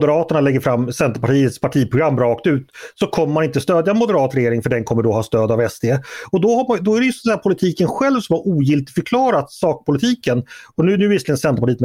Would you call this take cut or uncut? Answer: uncut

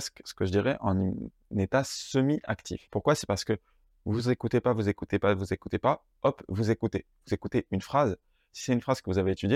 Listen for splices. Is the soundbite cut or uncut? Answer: uncut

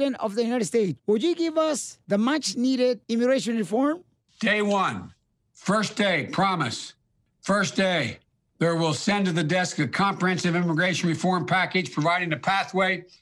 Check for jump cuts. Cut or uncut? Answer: uncut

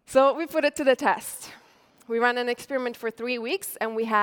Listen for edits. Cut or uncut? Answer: uncut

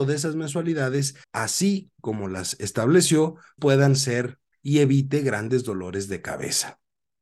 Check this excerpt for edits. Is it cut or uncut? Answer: cut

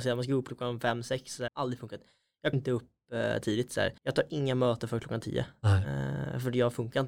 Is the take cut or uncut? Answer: cut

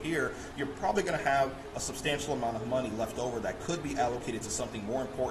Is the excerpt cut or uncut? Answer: uncut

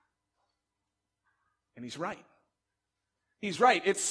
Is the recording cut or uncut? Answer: uncut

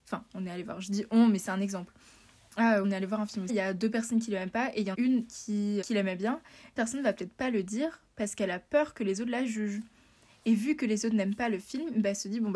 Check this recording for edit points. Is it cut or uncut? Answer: cut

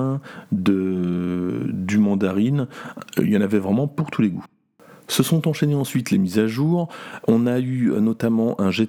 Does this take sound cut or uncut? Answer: uncut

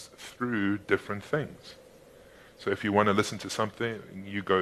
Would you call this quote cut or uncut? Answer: uncut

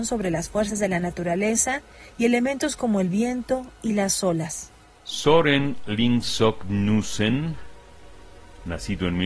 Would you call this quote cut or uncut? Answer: uncut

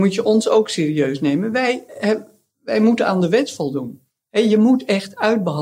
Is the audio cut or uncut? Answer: uncut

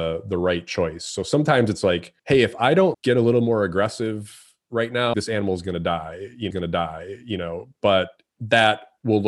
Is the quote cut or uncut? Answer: cut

